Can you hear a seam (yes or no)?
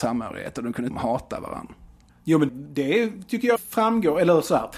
yes